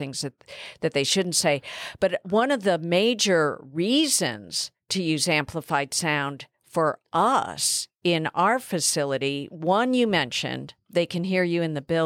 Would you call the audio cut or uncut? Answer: uncut